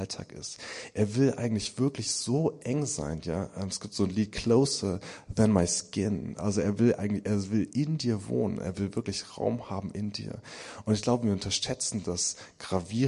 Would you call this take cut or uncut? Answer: uncut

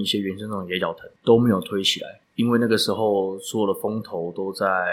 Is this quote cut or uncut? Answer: cut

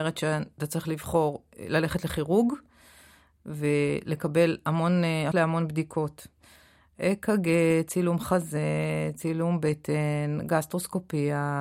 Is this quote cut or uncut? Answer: cut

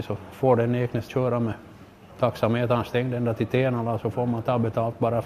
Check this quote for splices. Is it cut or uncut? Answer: cut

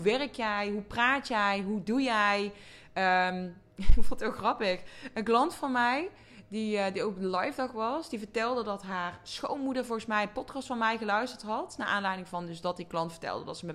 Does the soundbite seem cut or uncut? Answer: uncut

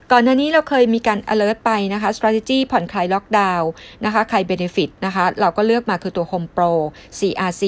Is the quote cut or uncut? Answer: uncut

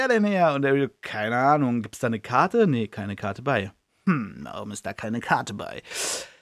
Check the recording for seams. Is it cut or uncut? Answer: uncut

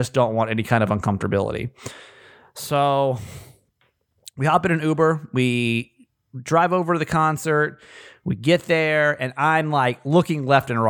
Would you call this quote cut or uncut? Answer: uncut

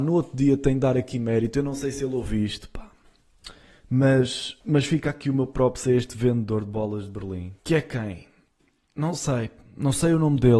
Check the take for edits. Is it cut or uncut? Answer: cut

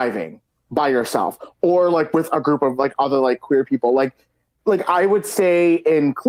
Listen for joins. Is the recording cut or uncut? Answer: uncut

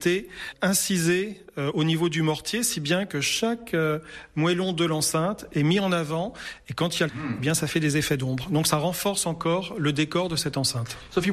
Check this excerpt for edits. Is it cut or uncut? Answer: cut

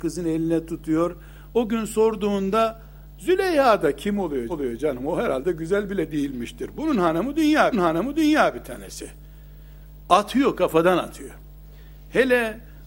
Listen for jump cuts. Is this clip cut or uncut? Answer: cut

